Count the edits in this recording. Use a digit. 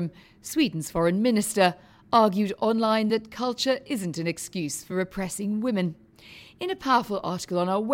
0